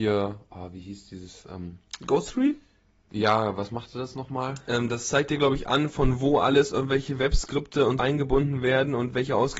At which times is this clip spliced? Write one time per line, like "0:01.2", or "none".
0:08.0